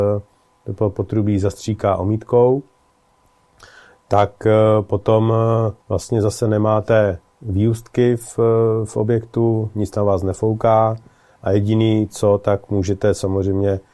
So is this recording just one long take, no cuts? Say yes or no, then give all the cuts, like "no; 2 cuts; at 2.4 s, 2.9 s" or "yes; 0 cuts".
no; 1 cut; at 5.8 s